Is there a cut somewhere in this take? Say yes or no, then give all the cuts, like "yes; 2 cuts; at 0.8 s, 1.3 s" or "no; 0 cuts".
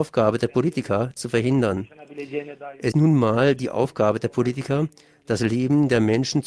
yes; 2 cuts; at 1.2 s, 2.9 s